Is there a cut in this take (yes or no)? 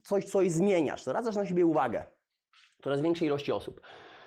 no